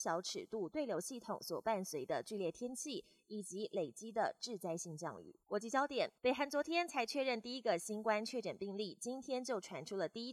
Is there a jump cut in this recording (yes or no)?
yes